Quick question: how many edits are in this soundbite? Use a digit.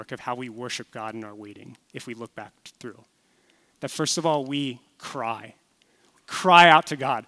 0